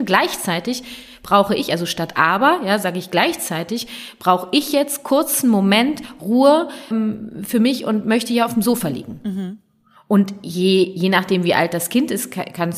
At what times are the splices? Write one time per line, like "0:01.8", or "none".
0:06.9

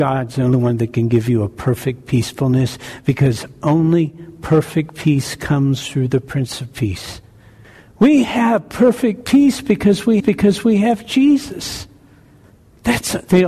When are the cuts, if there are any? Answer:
0:10.2

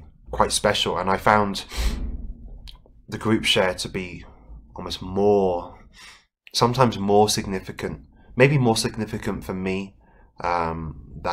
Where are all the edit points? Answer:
none

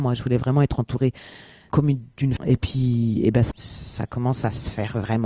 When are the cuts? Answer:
0:01.7
0:02.4
0:03.5

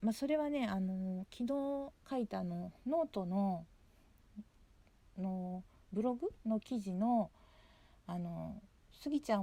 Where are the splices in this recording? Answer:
0:02.8

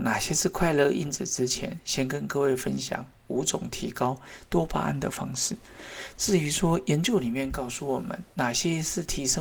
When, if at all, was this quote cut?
0:08.3

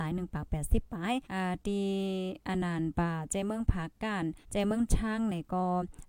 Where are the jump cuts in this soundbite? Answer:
0:01.2
0:04.4

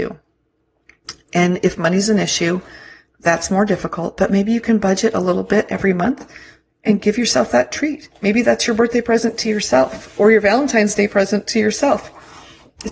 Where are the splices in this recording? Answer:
none

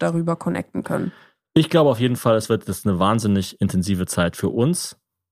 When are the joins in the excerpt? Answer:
none

